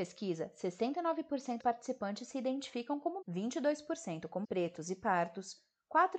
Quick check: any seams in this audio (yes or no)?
yes